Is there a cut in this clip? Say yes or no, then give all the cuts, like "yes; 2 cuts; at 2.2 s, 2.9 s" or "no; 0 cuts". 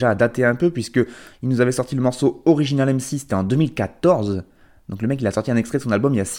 no; 0 cuts